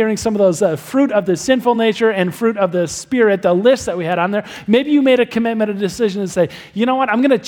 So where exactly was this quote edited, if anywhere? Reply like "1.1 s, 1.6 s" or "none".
none